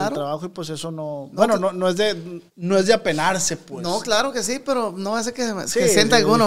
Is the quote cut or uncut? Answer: cut